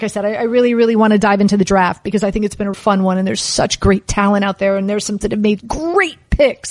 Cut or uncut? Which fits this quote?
cut